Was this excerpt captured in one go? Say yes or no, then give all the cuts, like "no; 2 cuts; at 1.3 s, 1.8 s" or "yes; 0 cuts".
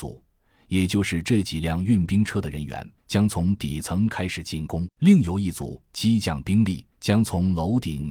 no; 2 cuts; at 3.0 s, 6.9 s